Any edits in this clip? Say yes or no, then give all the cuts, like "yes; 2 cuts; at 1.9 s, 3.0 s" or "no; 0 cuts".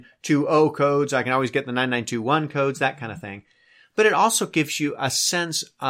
no; 0 cuts